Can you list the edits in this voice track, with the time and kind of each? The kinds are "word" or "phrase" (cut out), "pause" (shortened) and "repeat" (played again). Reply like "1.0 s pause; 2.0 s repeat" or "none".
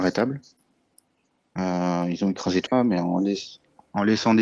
2.7 s phrase